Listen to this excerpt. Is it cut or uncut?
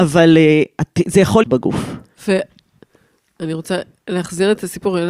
cut